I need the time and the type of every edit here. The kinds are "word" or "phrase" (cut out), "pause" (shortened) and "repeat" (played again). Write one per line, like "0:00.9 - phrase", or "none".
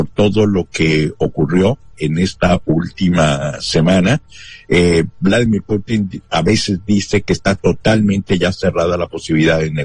none